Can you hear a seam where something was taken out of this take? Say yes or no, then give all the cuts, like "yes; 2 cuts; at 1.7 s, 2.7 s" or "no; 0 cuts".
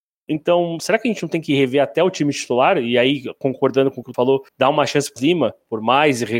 yes; 3 cuts; at 4.1 s, 4.5 s, 5.2 s